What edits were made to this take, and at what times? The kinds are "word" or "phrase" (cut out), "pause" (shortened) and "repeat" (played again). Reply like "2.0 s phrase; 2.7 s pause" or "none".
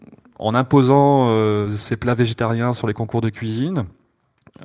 none